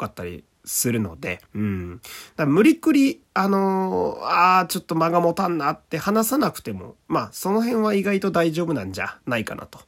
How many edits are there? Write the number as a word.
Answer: one